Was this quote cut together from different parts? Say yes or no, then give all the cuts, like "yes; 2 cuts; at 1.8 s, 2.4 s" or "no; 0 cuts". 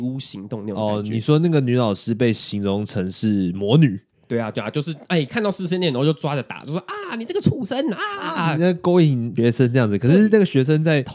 no; 0 cuts